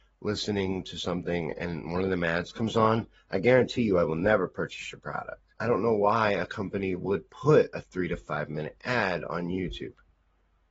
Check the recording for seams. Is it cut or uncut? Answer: cut